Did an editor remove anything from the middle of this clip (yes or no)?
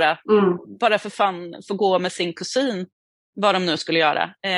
no